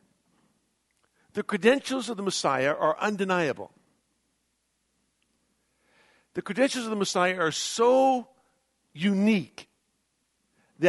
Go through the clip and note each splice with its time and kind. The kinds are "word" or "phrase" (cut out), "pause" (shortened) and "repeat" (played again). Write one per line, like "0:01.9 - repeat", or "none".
none